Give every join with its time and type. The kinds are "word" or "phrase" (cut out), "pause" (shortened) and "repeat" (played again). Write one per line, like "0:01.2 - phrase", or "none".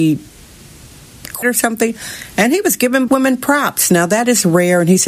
0:01.4 - word
0:03.1 - word